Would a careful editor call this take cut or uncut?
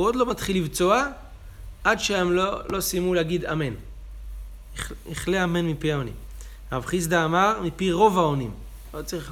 uncut